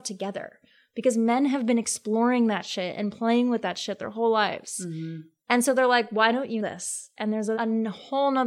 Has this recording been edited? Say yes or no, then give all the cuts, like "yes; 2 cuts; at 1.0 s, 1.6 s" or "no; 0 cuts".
yes; 2 cuts; at 6.6 s, 7.5 s